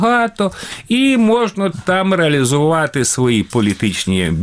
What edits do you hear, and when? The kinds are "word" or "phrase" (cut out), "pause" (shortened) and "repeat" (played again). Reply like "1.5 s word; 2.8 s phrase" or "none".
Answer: none